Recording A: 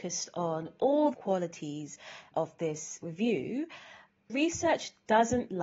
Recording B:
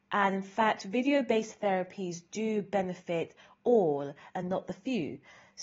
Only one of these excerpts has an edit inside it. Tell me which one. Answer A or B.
A